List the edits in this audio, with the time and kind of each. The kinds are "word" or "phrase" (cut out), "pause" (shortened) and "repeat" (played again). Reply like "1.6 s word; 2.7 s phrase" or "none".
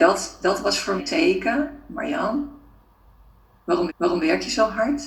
1.0 s word; 3.9 s repeat